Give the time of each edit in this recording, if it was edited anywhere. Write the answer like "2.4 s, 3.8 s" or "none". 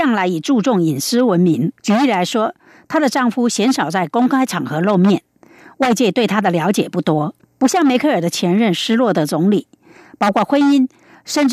1.8 s, 7.4 s